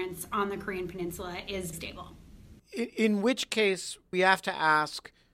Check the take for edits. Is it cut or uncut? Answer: cut